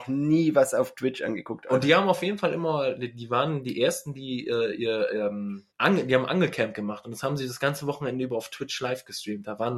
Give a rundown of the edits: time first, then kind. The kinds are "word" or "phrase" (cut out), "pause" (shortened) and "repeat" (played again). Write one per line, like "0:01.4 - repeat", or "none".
0:05.7 - pause